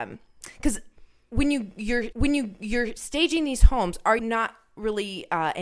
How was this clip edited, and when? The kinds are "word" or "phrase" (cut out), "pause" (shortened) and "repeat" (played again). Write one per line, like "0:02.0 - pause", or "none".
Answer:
0:02.1 - repeat
0:04.2 - word